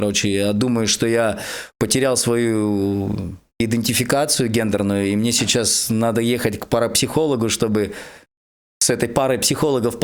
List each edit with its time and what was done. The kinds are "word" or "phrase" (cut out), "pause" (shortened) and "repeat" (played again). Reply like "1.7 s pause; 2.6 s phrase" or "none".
none